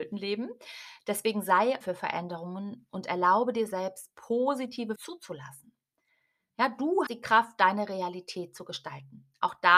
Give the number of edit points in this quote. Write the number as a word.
three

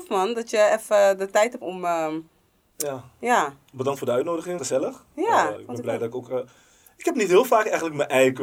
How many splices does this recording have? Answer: three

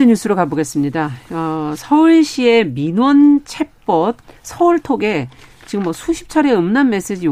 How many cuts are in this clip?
one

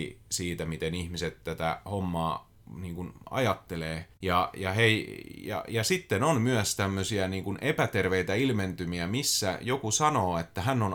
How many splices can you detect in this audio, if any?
one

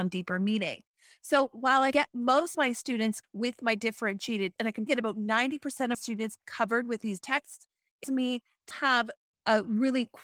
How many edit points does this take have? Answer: nine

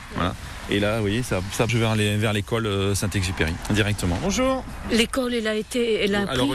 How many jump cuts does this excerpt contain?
one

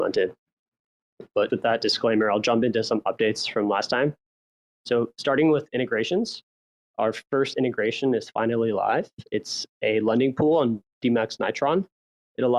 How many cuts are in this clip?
one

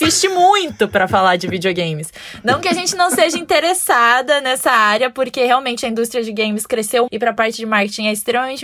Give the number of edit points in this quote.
one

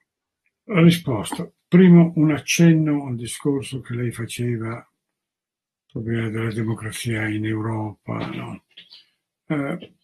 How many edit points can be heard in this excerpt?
zero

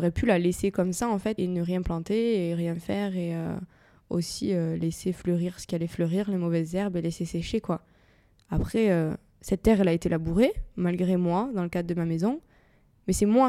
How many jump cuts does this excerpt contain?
one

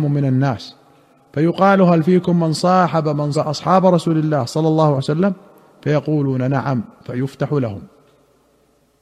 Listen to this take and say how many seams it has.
two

